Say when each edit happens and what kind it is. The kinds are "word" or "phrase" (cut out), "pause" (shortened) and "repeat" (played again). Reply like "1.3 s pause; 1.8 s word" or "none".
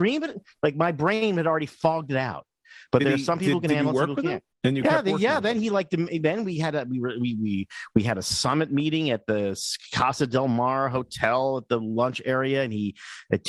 4.5 s pause

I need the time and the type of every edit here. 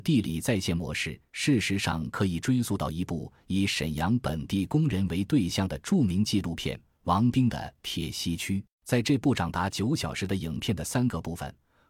8.7 s pause

